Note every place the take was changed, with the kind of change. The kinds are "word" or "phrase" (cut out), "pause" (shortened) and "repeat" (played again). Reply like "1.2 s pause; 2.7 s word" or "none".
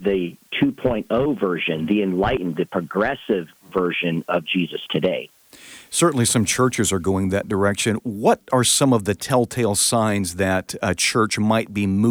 none